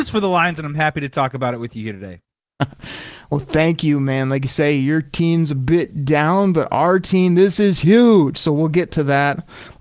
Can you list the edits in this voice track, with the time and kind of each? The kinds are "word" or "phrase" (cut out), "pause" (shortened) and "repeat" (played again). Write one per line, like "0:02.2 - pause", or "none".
none